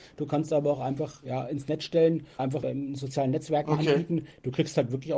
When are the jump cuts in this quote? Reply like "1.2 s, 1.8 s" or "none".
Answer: 2.4 s

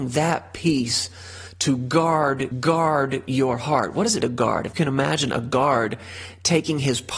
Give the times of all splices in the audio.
2.5 s, 4.2 s, 4.7 s

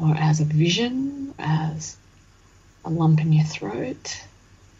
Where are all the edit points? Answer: 1.4 s

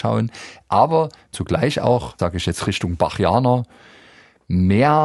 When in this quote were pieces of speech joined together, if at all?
1.3 s, 2.2 s

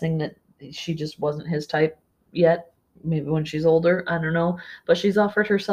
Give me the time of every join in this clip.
none

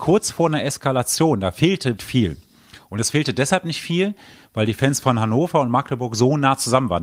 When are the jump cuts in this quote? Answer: 2.0 s

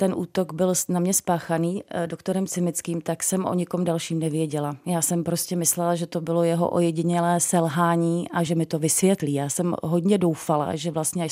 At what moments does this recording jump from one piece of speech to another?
none

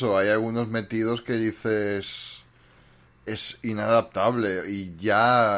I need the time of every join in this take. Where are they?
none

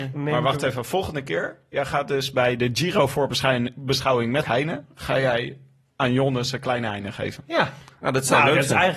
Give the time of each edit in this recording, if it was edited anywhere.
4.4 s

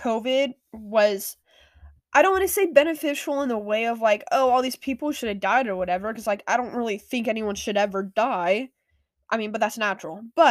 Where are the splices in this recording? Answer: none

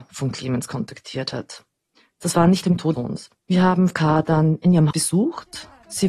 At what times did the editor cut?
2.6 s, 2.9 s, 3.4 s, 3.9 s, 4.9 s

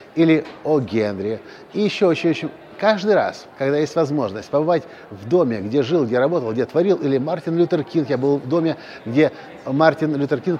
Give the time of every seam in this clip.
1.7 s, 3.5 s

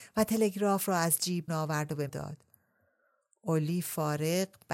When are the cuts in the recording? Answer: 1.5 s, 2.1 s

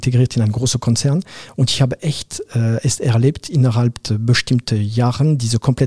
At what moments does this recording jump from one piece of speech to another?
none

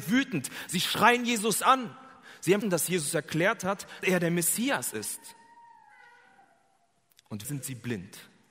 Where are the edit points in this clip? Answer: 2.6 s, 4.0 s, 7.4 s

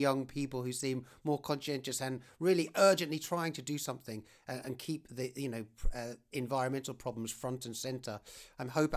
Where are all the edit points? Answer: none

